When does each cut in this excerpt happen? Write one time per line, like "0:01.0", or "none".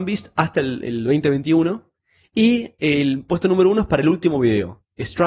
none